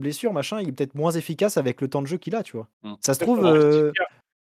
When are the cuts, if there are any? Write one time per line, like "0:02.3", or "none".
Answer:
0:02.7